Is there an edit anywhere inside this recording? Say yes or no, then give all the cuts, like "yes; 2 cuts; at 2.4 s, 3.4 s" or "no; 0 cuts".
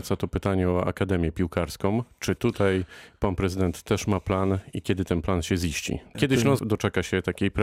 yes; 2 cuts; at 6.1 s, 6.6 s